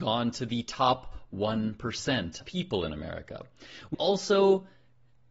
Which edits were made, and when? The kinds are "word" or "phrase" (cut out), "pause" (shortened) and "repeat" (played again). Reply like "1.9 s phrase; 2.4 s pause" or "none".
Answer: 2.4 s word; 3.9 s word